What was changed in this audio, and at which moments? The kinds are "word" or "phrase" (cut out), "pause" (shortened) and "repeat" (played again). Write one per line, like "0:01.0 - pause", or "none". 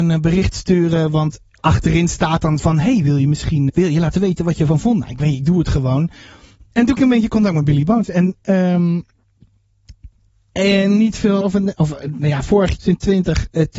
0:02.6 - word
0:03.7 - word
0:05.2 - word
0:07.0 - word
0:11.4 - word
0:12.8 - word